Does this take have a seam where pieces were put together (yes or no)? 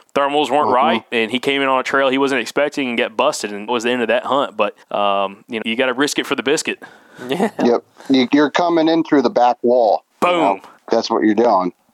yes